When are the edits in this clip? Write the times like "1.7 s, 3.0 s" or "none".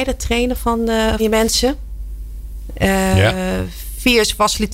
1.2 s